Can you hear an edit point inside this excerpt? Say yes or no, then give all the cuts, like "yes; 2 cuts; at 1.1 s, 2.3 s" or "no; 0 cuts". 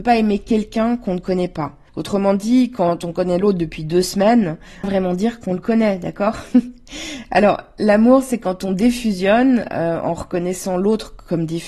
yes; 2 cuts; at 1.9 s, 4.8 s